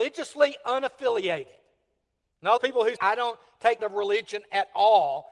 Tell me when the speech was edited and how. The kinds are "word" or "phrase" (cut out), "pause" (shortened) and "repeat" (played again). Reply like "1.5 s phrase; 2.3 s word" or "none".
2.6 s word; 3.0 s word; 3.8 s phrase